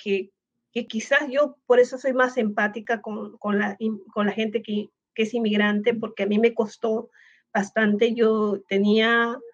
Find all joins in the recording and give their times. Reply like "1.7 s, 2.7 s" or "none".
none